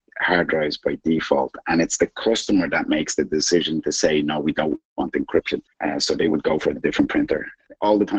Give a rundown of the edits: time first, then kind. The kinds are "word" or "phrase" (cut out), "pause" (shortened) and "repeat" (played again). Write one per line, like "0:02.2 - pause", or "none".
0:05.7 - pause
0:06.8 - phrase